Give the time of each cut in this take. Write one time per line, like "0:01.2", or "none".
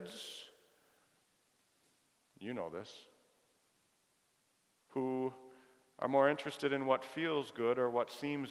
none

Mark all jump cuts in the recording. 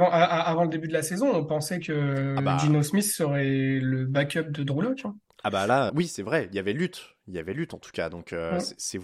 0:05.9

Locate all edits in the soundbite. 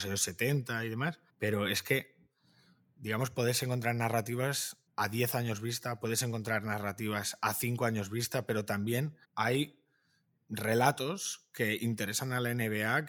0:01.3
0:04.9
0:09.2

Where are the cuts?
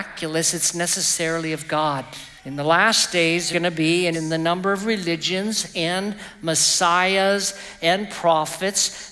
0:02.4
0:03.5
0:04.1

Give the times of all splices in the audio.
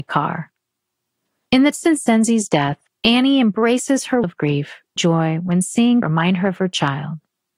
0:01.7
0:02.9
0:04.2
0:05.0
0:06.0

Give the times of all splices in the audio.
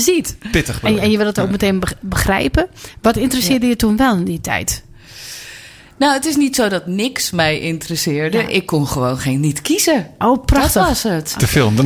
none

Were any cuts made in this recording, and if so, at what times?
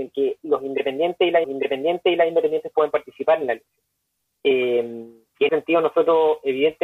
0:01.4
0:04.1
0:05.5

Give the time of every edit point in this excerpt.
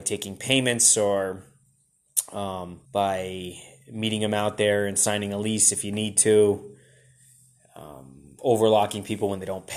0:02.9

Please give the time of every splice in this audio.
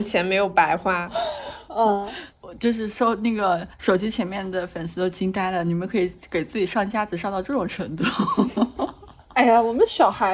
0:03.7

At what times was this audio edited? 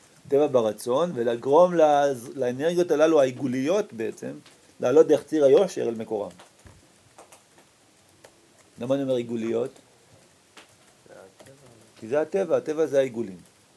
none

